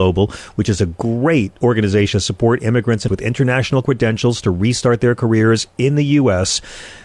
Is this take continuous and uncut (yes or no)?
no